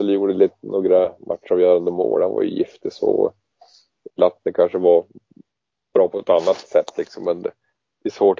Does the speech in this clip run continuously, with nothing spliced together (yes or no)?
yes